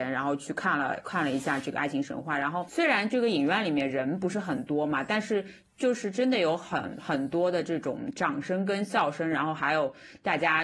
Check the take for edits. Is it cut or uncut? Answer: uncut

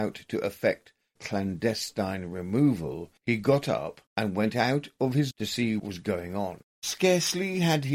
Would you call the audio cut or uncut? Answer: cut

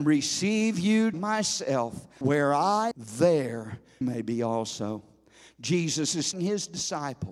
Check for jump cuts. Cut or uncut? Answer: cut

